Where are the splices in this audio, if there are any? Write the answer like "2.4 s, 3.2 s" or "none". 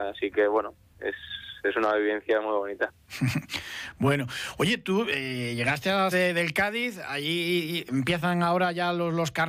6.1 s